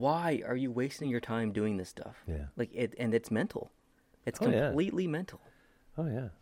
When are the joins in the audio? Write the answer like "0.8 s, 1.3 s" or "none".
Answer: none